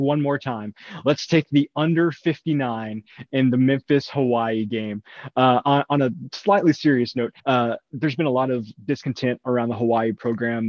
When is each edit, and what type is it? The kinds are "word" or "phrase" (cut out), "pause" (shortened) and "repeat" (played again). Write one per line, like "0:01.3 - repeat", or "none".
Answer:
0:07.4 - pause